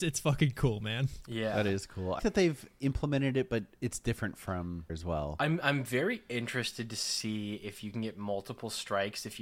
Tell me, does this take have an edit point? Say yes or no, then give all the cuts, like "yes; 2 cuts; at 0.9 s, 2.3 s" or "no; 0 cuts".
yes; 2 cuts; at 2.2 s, 4.9 s